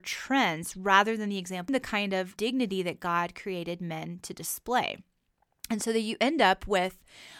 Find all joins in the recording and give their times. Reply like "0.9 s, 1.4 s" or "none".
1.7 s, 2.4 s